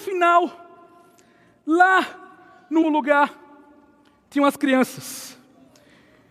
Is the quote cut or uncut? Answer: cut